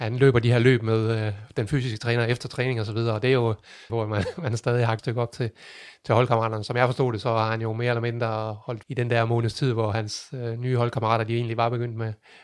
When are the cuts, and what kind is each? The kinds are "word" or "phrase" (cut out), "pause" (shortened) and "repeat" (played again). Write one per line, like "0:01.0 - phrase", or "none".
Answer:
0:03.9 - phrase
0:05.0 - word
0:08.8 - phrase